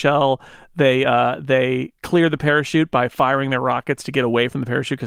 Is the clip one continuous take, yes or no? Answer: yes